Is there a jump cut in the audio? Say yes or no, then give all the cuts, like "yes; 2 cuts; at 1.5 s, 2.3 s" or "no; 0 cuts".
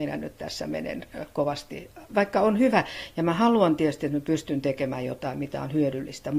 yes; 1 cut; at 2.1 s